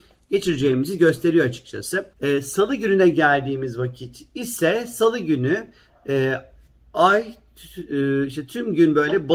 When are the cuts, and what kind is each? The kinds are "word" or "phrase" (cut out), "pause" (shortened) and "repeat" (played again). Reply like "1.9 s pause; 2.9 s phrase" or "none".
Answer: 2.1 s pause